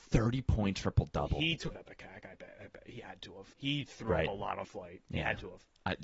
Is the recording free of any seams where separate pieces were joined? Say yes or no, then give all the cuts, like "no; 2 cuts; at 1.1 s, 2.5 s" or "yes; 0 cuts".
no; 3 cuts; at 1.7 s, 3.5 s, 4.6 s